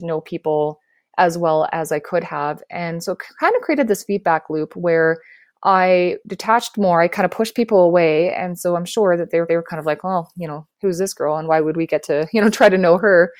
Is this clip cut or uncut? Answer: cut